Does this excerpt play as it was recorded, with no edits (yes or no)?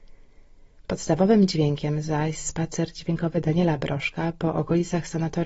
yes